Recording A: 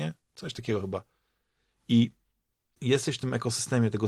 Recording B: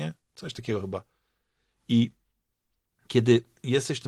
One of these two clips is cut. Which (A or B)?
A